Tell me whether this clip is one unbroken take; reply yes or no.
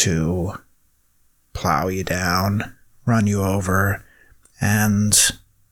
yes